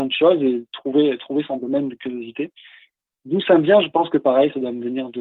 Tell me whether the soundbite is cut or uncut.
uncut